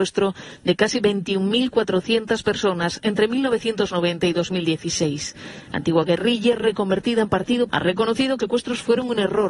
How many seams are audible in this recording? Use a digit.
2